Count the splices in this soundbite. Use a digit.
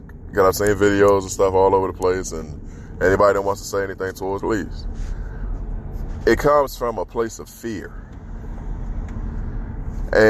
1